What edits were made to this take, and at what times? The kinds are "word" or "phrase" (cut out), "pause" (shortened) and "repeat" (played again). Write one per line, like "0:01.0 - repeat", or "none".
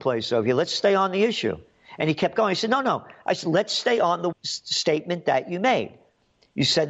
0:04.3 - word